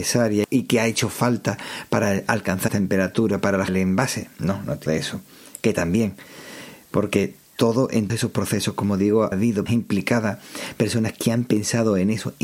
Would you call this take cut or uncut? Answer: cut